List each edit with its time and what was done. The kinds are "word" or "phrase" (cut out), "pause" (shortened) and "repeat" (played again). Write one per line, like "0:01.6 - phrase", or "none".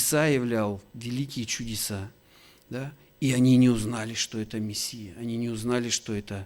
none